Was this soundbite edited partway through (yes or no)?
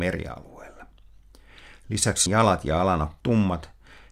yes